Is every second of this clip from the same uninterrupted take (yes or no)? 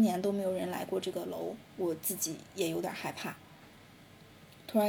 no